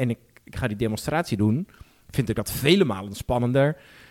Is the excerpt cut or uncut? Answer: uncut